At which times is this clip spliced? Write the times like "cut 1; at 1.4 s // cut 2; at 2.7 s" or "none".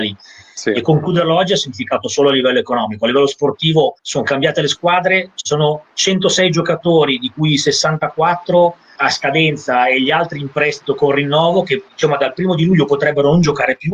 cut 1; at 4.0 s // cut 2; at 9.0 s